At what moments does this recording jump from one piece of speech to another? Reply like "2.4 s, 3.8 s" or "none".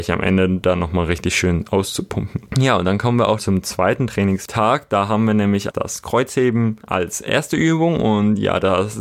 3.4 s, 5.7 s